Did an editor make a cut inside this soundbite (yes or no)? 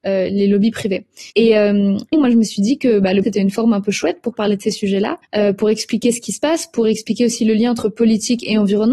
yes